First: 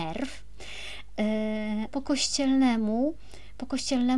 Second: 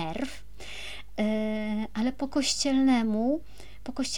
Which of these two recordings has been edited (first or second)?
first